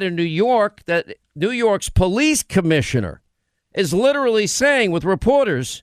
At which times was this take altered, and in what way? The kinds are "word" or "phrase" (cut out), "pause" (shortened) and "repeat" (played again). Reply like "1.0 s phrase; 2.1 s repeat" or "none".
none